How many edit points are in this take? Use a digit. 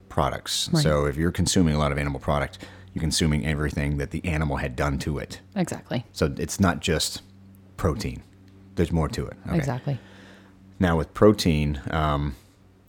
1